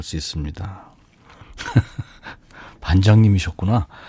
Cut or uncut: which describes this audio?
uncut